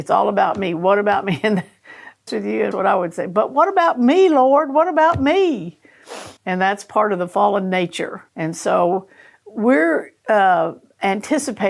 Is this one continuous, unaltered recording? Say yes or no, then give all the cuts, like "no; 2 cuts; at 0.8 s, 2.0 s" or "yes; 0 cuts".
no; 4 cuts; at 2.3 s, 2.7 s, 6.4 s, 8.3 s